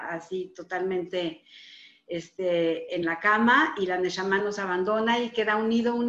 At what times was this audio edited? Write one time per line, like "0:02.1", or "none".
none